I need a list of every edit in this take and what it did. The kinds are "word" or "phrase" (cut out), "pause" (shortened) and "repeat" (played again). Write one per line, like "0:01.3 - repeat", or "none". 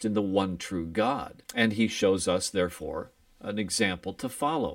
0:01.4 - pause

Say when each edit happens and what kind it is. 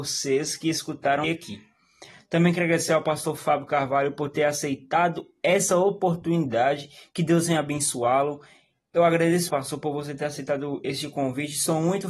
0:01.2 - word
0:09.5 - word

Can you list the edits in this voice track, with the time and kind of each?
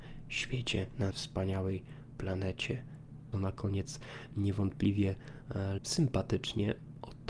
0:01.1 - word
0:03.3 - phrase
0:05.8 - word

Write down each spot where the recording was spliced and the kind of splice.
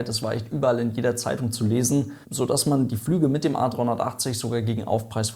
0:02.2 - pause

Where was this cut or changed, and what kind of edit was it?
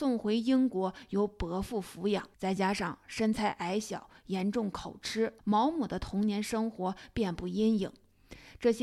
0:02.3 - pause
0:05.4 - pause

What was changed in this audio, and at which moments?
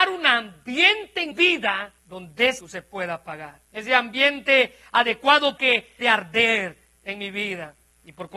0:01.3 - word
0:02.0 - pause
0:02.6 - word
0:03.7 - pause
0:05.6 - word
0:06.0 - phrase

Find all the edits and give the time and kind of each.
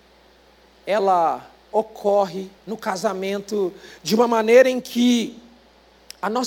0:02.6 - pause

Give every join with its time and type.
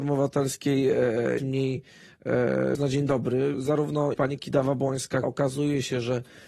0:01.4 - word
0:02.7 - word
0:03.5 - word
0:04.1 - word
0:05.2 - word

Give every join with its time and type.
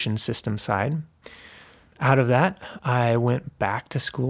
none

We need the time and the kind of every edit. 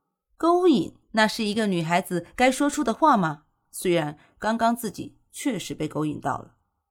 0:01.0 - pause

